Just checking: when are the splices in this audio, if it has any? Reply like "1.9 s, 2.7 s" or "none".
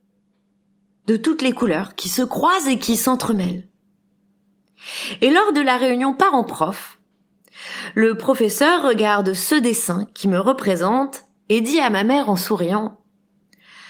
none